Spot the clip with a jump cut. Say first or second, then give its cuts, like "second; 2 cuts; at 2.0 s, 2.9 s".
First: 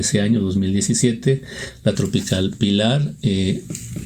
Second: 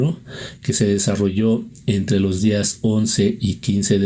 first; 1 cut; at 1.9 s